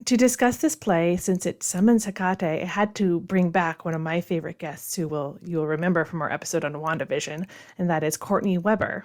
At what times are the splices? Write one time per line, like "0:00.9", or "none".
none